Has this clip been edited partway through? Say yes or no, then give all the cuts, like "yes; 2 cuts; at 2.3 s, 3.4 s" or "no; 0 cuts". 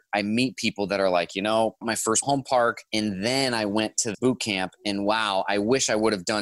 yes; 4 cuts; at 1.8 s, 2.2 s, 2.9 s, 4.1 s